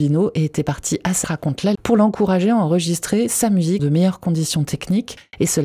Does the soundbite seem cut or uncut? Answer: cut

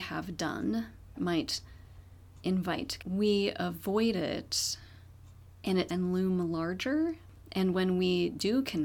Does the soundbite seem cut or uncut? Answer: cut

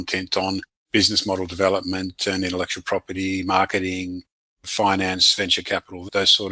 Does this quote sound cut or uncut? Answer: uncut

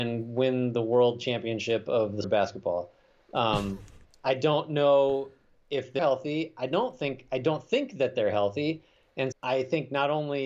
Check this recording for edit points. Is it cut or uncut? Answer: cut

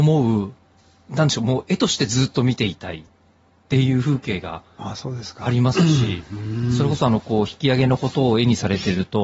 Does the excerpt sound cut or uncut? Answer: uncut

